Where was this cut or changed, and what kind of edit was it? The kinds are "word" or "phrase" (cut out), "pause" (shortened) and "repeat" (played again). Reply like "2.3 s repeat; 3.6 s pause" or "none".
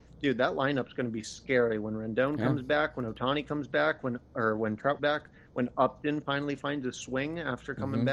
5.0 s word